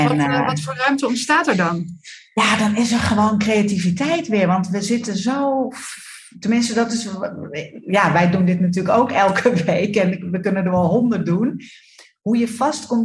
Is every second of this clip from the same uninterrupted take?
yes; 0 cuts

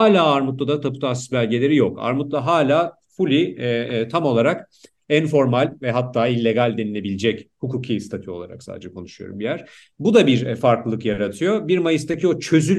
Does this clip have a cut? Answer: no; 0 cuts

